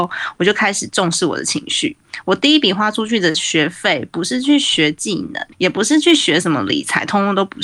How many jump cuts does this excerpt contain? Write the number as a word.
one